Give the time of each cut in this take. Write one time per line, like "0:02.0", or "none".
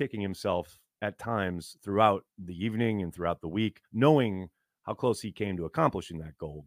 0:02.3
0:03.8